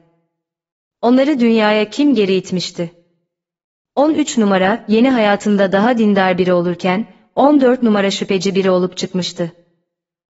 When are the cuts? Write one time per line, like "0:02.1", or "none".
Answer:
none